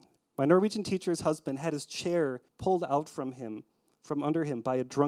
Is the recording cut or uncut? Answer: cut